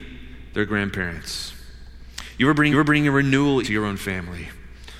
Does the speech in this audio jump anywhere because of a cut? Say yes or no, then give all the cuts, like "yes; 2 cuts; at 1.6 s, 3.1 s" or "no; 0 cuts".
yes; 2 cuts; at 2.7 s, 3.6 s